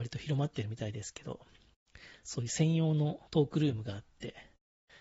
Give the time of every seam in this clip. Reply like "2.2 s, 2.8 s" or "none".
3.3 s